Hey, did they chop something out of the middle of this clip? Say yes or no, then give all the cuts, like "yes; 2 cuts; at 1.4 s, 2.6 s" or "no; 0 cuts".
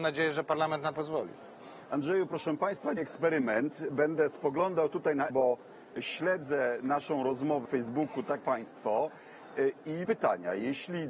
yes; 6 cuts; at 0.9 s, 3.0 s, 5.3 s, 7.6 s, 8.4 s, 10.0 s